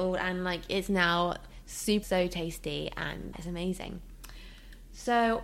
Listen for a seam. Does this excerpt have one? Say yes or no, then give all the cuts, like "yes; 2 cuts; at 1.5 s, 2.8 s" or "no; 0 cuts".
yes; 2 cuts; at 2.0 s, 3.3 s